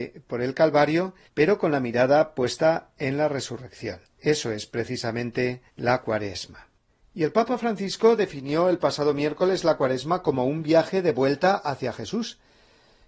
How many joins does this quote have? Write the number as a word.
four